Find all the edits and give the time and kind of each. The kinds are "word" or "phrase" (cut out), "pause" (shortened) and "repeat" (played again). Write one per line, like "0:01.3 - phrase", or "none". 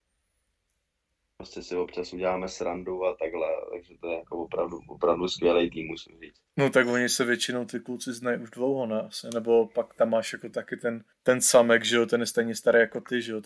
0:06.5 - pause
0:11.1 - pause